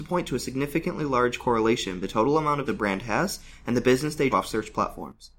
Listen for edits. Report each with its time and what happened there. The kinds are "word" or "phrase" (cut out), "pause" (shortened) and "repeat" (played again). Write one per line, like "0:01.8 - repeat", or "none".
0:02.0 - word
0:02.7 - word
0:04.3 - word